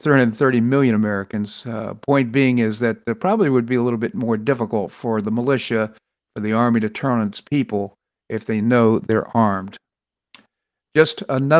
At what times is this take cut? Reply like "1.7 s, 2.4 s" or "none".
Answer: none